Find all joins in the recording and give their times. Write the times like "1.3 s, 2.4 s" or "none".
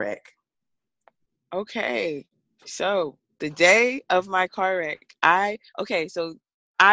5.7 s